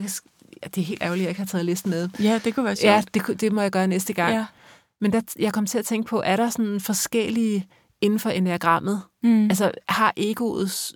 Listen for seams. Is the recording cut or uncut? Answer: uncut